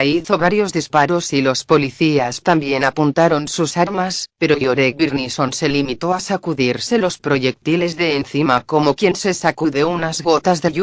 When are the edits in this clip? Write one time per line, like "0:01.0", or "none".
none